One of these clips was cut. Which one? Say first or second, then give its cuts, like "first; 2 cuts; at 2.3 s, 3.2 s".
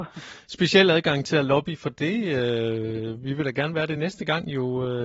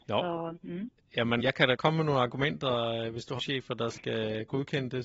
second; 3 cuts; at 1.4 s, 1.8 s, 3.4 s